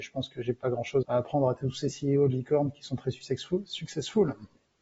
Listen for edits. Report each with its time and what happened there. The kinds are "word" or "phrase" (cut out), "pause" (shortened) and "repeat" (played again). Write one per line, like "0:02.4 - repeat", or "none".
0:01.0 - word